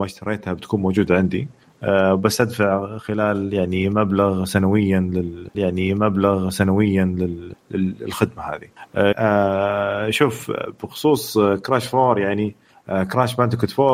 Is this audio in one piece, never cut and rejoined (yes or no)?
no